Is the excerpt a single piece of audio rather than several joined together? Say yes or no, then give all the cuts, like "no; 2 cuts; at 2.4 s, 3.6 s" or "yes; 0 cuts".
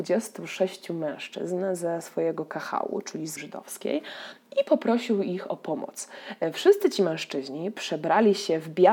no; 1 cut; at 3.4 s